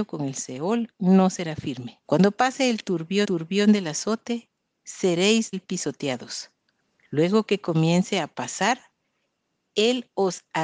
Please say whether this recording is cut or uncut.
cut